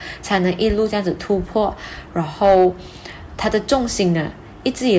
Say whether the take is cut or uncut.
cut